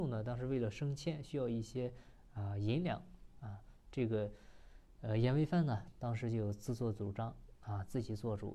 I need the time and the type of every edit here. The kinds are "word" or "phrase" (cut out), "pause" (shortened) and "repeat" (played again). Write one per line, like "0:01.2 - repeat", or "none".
none